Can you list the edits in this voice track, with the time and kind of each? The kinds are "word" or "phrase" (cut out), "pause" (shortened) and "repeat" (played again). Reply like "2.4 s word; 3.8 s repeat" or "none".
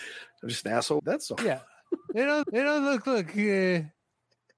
1.0 s phrase; 1.4 s word; 2.4 s repeat